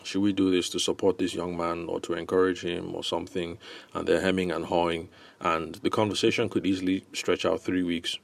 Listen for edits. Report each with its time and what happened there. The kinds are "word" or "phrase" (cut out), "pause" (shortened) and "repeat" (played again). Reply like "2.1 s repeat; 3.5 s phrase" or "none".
none